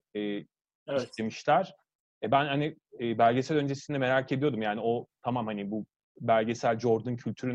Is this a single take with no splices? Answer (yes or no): yes